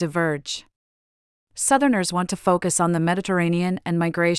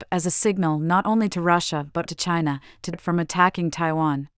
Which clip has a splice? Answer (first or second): second